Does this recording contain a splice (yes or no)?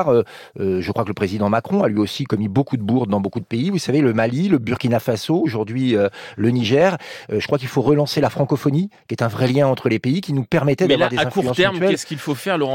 no